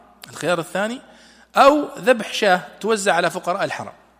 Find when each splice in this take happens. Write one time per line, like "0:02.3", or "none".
none

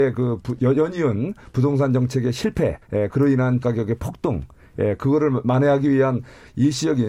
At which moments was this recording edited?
0:02.8
0:03.6

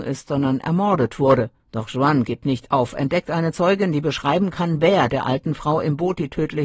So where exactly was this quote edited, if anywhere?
0:01.6

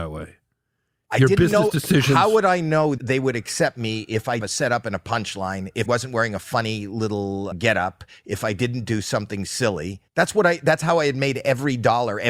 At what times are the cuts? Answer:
0:03.0
0:04.4
0:05.9
0:07.5
0:10.1

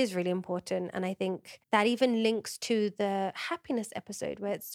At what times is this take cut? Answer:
0:01.6

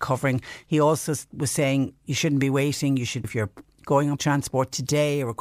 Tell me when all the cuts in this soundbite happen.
0:03.2
0:04.2

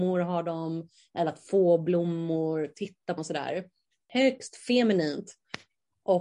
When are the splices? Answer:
0:03.2

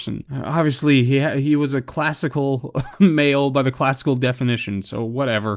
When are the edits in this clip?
none

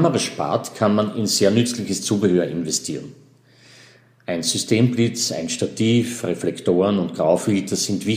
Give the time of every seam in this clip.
none

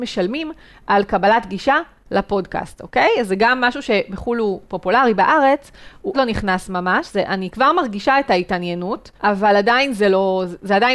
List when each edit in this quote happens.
0:06.1
0:09.2

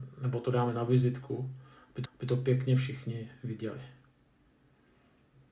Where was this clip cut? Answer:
0:02.1

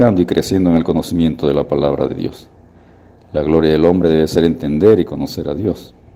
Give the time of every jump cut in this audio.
none

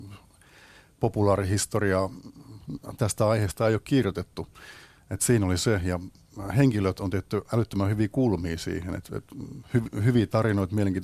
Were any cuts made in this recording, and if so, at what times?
none

